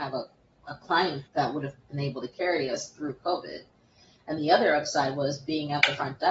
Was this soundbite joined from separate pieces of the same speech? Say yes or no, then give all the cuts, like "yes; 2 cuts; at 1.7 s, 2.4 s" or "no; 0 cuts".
yes; 2 cuts; at 1.3 s, 4.4 s